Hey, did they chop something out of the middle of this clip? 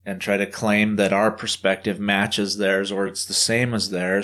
no; 0 cuts

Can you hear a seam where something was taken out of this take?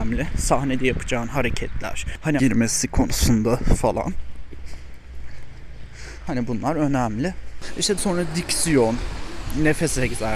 yes; 2 cuts; at 2.4 s, 8.0 s

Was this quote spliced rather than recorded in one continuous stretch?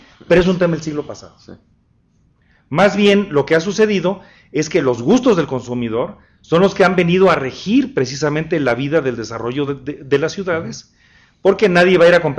no; 0 cuts

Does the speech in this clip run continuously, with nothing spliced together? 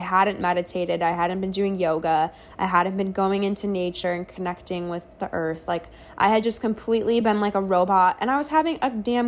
yes; 0 cuts

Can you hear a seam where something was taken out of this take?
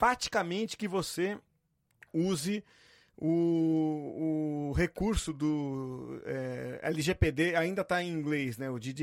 no; 0 cuts

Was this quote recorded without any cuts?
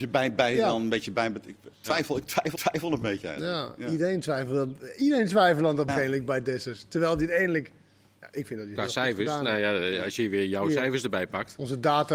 no; 3 cuts; at 1.7 s, 2.6 s, 5.9 s

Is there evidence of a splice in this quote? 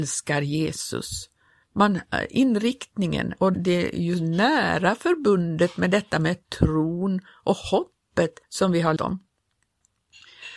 yes; 3 cuts; at 3.5 s, 8.4 s, 9.0 s

